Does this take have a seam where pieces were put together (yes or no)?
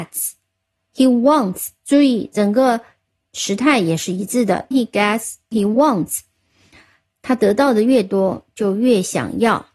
yes